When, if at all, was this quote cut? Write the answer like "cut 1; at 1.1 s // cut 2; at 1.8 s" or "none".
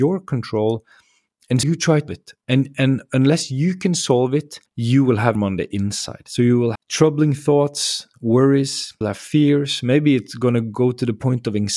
cut 1; at 1.6 s // cut 2; at 2.1 s // cut 3; at 4.7 s // cut 4; at 5.4 s // cut 5; at 6.8 s // cut 6; at 9.0 s